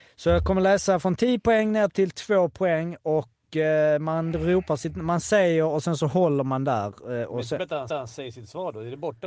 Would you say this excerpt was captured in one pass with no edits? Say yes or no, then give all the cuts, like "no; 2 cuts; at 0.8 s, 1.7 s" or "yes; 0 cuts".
no; 1 cut; at 7.9 s